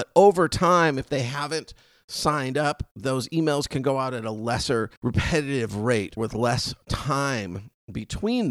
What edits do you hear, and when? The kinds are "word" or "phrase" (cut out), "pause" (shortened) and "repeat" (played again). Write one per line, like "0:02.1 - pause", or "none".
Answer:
0:05.0 - pause
0:06.2 - word